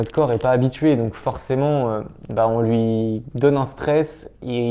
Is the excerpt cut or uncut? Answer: uncut